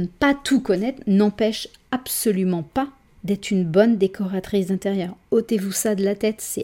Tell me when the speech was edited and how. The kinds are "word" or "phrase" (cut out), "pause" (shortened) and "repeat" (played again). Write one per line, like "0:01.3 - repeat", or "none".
none

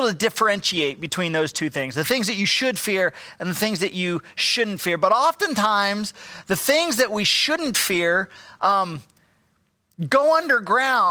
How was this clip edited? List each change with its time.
none

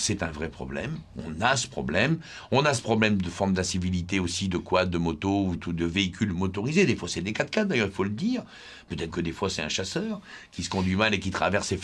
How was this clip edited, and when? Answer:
0:05.6 - word
0:09.1 - word

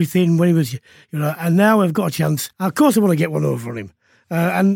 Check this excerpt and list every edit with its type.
0:02.5 - pause

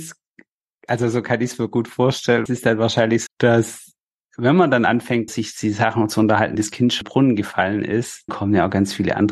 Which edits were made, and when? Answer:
0:02.5 - word
0:03.3 - word
0:05.3 - word
0:06.5 - word
0:07.0 - word
0:08.3 - word

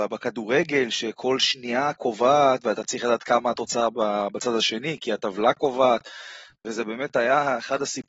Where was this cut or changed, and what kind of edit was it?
none

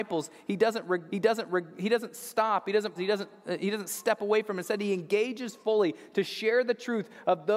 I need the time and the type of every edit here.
0:01.1 - repeat
0:03.0 - word

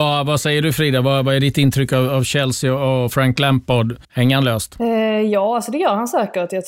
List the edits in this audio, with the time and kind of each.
0:04.0 - pause

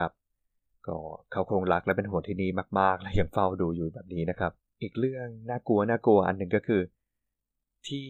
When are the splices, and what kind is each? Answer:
none

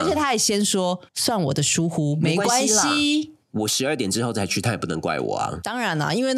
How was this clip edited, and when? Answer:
0:01.1 - pause
0:03.4 - pause

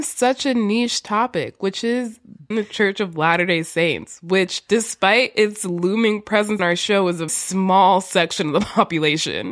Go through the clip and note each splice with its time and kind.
0:02.5 - phrase
0:06.6 - word
0:07.3 - word

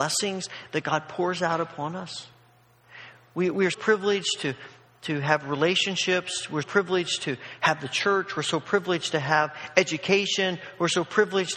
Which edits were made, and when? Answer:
0:03.7 - word
0:06.6 - word

